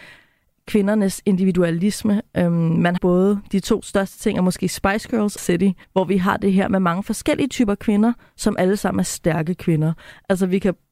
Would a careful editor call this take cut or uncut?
cut